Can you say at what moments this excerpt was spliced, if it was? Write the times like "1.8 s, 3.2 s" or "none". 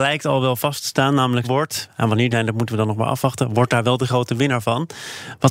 1.4 s, 2.3 s